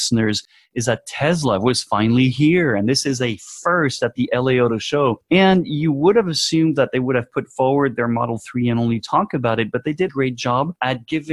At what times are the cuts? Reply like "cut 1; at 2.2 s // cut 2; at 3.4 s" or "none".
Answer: cut 1; at 10.1 s